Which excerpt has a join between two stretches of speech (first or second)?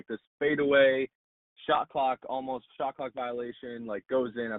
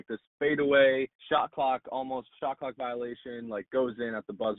second